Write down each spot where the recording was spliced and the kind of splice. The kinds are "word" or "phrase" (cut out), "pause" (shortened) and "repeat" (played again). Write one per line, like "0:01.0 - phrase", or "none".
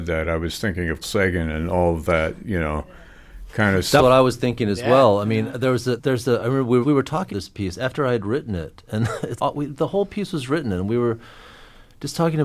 0:01.0 - word
0:04.0 - word
0:05.5 - word
0:06.0 - word
0:06.8 - word
0:07.3 - word
0:09.4 - word